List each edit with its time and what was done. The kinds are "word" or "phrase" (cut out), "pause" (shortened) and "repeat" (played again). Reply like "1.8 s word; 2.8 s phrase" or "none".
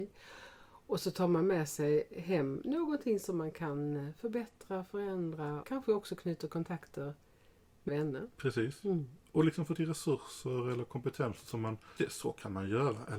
5.6 s word; 7.9 s word; 9.8 s word; 12.0 s word